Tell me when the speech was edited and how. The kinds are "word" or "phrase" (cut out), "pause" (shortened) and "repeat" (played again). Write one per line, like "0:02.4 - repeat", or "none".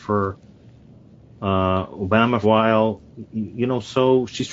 0:02.4 - phrase